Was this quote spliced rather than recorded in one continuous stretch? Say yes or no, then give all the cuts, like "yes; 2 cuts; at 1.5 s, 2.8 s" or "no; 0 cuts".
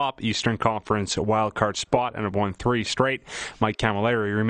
no; 0 cuts